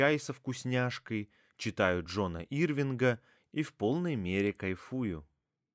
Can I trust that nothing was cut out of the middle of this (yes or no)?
yes